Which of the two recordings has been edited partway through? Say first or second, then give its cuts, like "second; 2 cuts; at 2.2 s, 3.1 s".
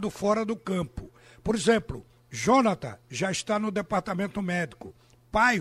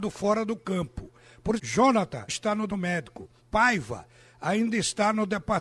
second; 4 cuts; at 1.6 s, 2.3 s, 2.7 s, 3.4 s